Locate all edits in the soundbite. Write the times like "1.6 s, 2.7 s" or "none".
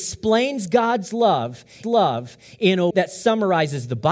1.8 s, 2.9 s